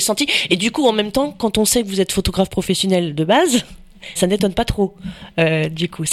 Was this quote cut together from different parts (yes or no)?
yes